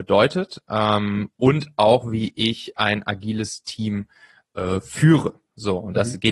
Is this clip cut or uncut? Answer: uncut